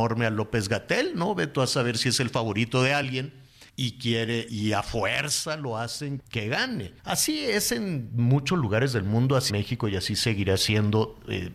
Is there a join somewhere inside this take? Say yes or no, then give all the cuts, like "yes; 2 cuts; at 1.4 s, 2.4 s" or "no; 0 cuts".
yes; 5 cuts; at 3.7 s, 4.5 s, 6.2 s, 7.0 s, 9.5 s